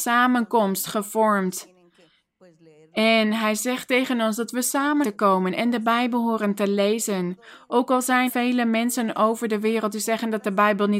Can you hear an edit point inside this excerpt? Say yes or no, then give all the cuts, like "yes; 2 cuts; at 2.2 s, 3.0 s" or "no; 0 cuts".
yes; 2 cuts; at 5.0 s, 8.3 s